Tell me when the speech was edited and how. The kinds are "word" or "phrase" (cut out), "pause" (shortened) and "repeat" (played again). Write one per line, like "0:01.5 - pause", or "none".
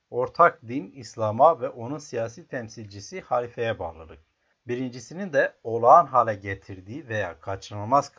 none